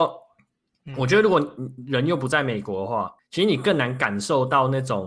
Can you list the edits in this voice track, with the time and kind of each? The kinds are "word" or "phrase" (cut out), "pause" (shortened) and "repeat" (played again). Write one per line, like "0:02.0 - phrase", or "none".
0:03.2 - pause